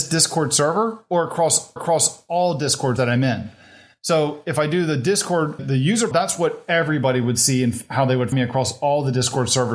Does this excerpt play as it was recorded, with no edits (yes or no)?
no